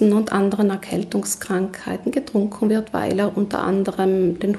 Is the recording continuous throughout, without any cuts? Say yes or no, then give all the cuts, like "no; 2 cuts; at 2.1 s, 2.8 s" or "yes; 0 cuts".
yes; 0 cuts